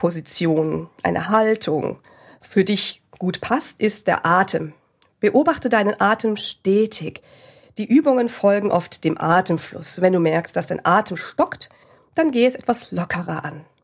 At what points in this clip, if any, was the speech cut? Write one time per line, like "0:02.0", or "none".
none